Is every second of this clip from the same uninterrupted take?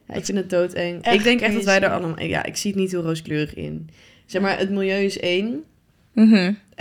yes; 0 cuts

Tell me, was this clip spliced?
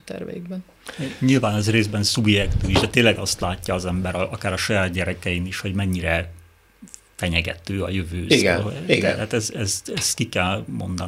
no; 0 cuts

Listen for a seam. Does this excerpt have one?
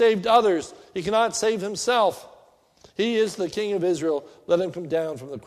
no; 0 cuts

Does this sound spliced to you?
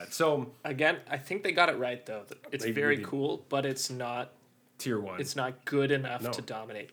no; 0 cuts

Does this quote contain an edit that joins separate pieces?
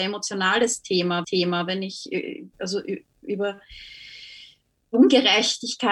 yes; 2 cuts; at 1.2 s, 2.5 s

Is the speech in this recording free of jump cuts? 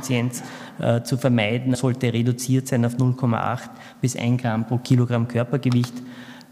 no; 1 cut; at 1.7 s

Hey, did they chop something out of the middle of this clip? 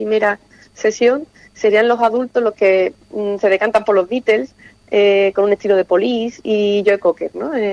no; 0 cuts

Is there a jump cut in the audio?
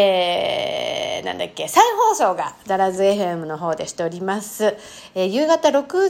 no; 0 cuts

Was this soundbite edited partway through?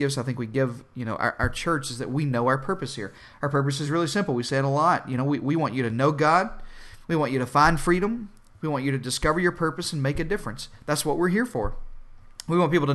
no; 0 cuts

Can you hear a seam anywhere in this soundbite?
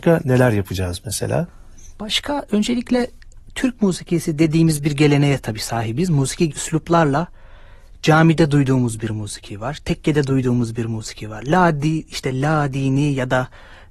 yes; 1 cut; at 6.5 s

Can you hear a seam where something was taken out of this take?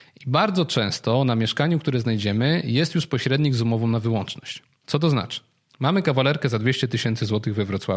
no; 0 cuts

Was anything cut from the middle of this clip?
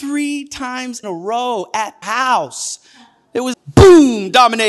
yes; 3 cuts; at 1.0 s, 2.0 s, 3.5 s

